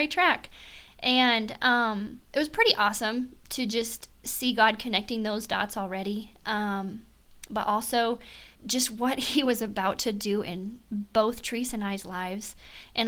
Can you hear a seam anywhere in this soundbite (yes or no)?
yes